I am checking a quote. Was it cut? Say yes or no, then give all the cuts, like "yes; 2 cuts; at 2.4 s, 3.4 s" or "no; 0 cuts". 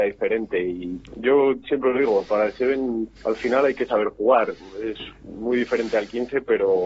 yes; 1 cut; at 3.2 s